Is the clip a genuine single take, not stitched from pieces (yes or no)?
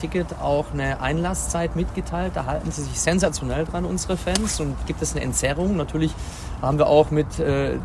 no